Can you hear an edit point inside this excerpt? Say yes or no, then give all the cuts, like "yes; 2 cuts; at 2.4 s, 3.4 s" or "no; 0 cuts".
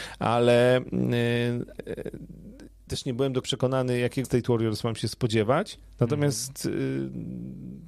yes; 4 cuts; at 1.8 s, 2.9 s, 3.4 s, 4.2 s